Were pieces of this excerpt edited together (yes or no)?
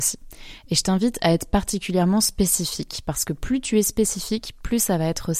no